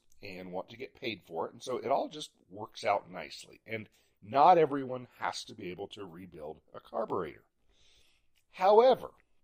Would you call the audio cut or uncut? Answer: uncut